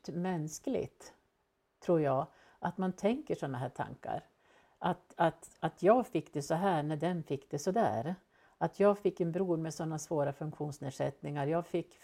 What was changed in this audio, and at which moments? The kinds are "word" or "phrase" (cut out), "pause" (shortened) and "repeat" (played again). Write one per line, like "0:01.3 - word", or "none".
none